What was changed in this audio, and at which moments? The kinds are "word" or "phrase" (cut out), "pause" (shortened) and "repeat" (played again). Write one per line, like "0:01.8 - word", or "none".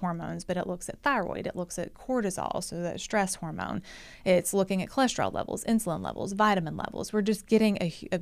none